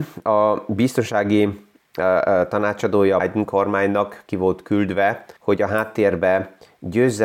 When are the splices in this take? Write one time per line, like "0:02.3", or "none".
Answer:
0:03.2
0:05.4